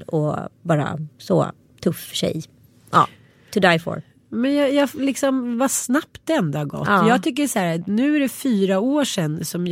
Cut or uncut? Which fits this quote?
uncut